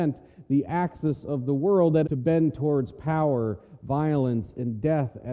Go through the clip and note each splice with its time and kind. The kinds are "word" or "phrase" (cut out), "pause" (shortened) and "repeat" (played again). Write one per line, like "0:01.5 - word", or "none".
0:02.0 - word